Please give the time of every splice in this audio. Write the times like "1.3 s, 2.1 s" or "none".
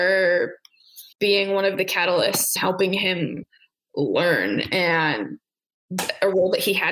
1.1 s, 2.6 s